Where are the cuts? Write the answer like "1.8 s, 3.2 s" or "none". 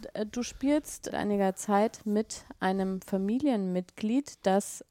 1.1 s